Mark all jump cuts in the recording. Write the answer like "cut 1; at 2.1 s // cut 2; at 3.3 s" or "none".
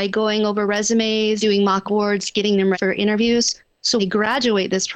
cut 1; at 1.4 s // cut 2; at 1.9 s // cut 3; at 2.7 s // cut 4; at 4.0 s